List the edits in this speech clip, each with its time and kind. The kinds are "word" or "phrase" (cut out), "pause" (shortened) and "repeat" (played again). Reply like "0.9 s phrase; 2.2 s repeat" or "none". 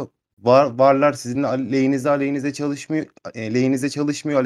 none